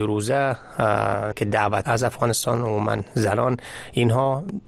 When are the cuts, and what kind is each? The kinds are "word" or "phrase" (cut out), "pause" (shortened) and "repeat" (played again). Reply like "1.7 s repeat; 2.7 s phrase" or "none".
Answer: 1.3 s word; 1.8 s word